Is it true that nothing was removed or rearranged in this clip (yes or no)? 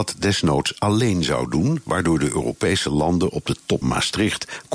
no